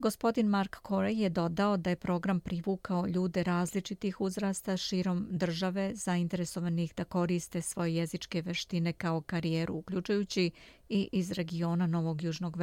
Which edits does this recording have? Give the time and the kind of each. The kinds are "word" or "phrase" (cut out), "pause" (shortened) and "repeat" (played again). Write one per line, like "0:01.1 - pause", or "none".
none